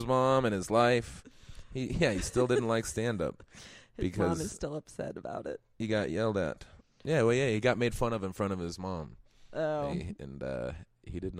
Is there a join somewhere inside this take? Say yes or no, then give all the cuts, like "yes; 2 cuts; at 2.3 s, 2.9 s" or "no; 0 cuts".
no; 0 cuts